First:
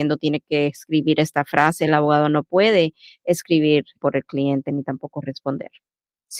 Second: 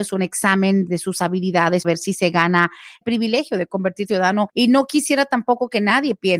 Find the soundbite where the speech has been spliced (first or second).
second